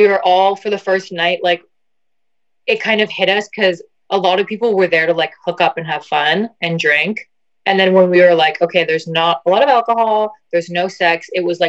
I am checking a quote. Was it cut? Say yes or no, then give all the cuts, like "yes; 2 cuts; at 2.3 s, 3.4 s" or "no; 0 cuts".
no; 0 cuts